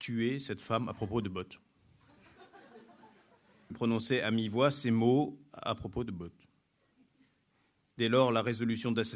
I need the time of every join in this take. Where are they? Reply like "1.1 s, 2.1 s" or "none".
3.7 s